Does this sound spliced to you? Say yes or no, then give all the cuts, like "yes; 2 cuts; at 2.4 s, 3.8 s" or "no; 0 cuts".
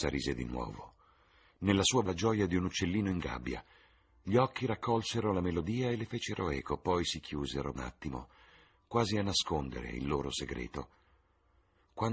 yes; 2 cuts; at 2.1 s, 7.8 s